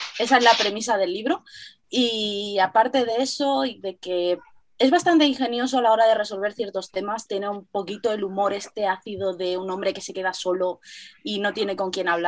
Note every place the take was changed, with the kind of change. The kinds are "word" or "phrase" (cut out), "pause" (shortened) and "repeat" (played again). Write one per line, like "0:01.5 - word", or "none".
none